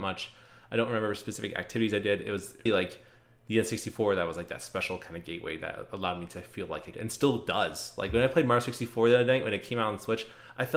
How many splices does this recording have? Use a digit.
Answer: 2